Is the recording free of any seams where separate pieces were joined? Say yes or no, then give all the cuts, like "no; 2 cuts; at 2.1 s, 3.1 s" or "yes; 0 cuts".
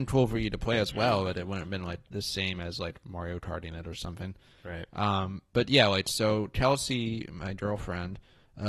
yes; 0 cuts